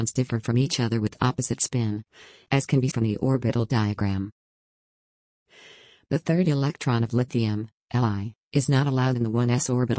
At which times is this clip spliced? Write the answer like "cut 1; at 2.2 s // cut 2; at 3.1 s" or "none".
cut 1; at 2.9 s